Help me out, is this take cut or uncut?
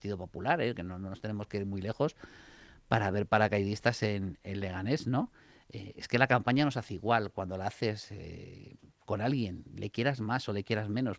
uncut